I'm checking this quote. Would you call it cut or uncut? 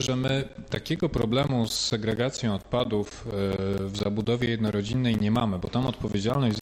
uncut